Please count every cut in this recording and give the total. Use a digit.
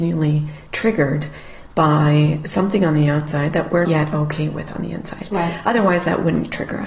1